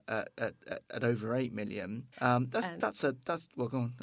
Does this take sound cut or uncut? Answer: cut